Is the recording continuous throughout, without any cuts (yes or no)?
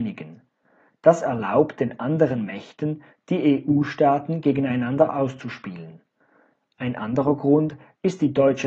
yes